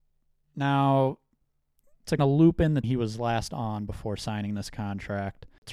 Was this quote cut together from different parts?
yes; 2 cuts; at 2.2 s, 2.8 s

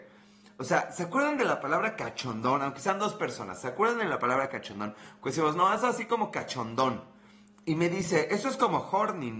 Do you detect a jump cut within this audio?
no; 0 cuts

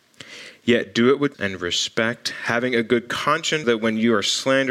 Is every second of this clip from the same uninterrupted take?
no; 2 cuts; at 1.3 s, 3.6 s

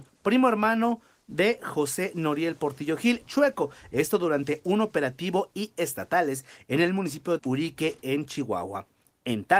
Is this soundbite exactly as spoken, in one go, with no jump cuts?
no; 3 cuts; at 3.3 s, 5.5 s, 7.4 s

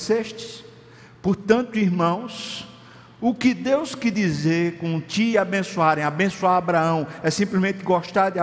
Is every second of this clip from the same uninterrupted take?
yes; 0 cuts

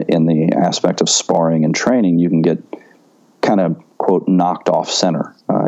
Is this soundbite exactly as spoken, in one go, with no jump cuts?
yes; 0 cuts

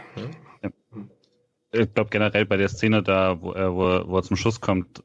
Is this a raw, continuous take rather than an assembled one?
yes; 0 cuts

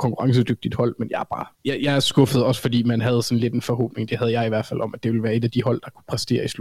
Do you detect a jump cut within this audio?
yes; 1 cut; at 1.5 s

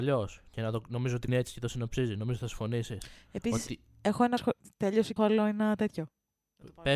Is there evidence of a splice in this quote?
yes; 3 cuts; at 1.3 s, 4.4 s, 5.2 s

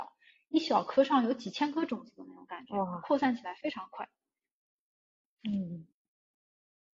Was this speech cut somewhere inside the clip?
no; 0 cuts

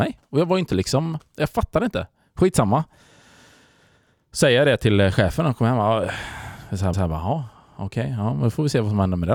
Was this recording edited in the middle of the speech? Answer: yes; 1 cut; at 6.9 s

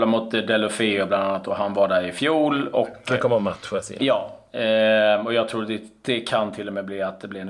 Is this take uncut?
yes; 0 cuts

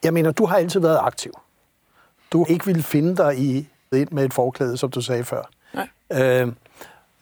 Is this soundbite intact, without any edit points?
no; 2 cuts; at 2.4 s, 3.9 s

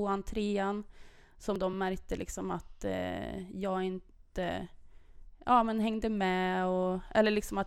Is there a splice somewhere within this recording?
no; 0 cuts

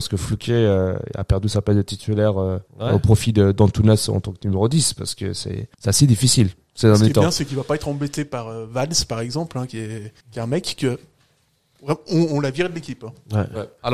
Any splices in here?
yes; 3 cuts; at 2.7 s, 5.7 s, 10.2 s

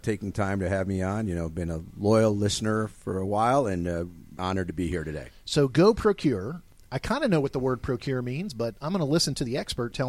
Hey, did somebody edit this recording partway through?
yes; 1 cut; at 4.4 s

